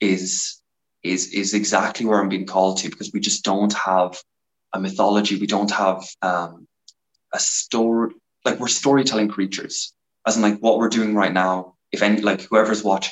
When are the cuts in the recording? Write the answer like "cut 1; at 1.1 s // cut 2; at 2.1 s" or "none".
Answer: cut 1; at 6.2 s